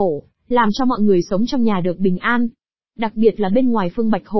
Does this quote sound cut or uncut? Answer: uncut